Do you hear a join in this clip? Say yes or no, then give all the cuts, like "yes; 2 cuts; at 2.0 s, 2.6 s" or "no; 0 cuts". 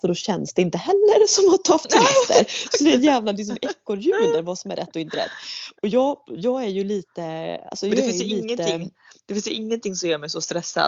no; 0 cuts